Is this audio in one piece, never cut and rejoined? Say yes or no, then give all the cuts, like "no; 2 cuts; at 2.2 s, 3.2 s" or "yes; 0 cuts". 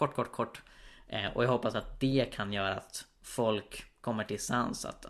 yes; 0 cuts